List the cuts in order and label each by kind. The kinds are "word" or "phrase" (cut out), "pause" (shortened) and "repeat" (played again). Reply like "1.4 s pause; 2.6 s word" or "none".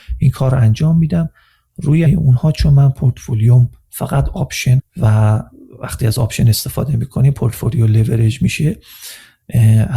2.1 s word; 4.8 s word